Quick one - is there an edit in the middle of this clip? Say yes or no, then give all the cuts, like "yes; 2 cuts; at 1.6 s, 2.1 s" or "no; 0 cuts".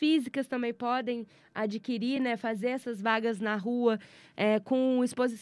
no; 0 cuts